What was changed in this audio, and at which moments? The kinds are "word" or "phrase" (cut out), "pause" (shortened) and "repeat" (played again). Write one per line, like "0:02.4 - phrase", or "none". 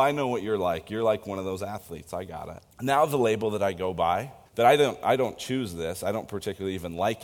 0:02.7 - pause
0:04.5 - pause